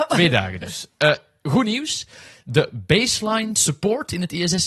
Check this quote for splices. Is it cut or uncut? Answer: uncut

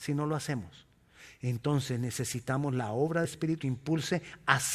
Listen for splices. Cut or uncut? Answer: cut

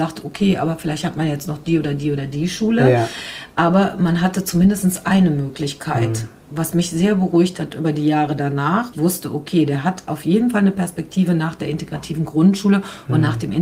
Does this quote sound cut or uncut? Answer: cut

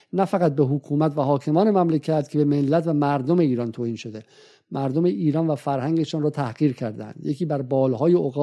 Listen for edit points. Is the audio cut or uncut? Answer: uncut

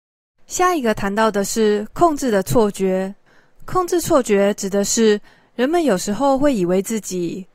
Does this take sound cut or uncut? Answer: uncut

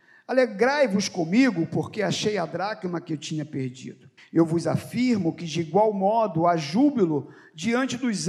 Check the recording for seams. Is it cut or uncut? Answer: cut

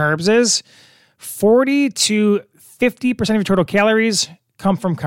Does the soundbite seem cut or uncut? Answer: uncut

